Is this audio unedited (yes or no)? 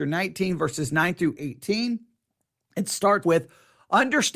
no